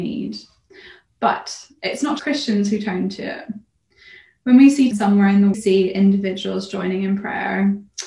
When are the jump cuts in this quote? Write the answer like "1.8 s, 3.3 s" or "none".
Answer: 2.2 s, 4.9 s, 5.5 s